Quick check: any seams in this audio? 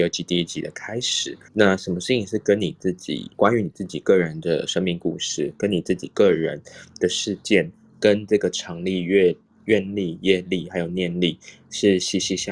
yes; 2 cuts; at 1.5 s, 3.3 s

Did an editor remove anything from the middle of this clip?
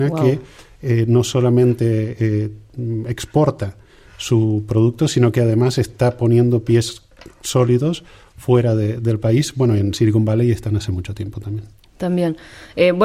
no; 0 cuts

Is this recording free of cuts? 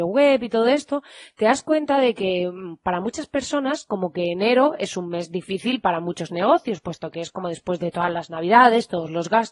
yes; 0 cuts

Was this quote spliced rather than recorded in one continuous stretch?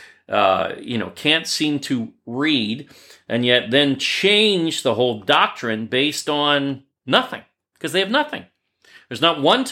no; 0 cuts

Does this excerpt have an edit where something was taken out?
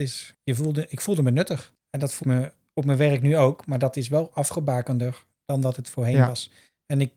yes; 1 cut; at 2.2 s

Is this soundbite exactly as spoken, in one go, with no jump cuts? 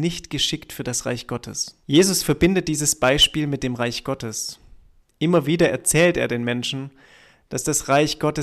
no; 2 cuts; at 1.8 s, 5.0 s

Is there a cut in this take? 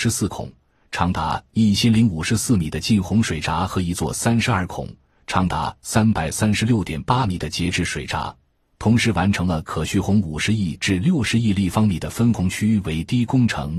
no; 0 cuts

